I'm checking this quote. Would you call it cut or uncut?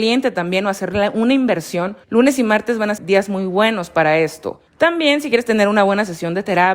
cut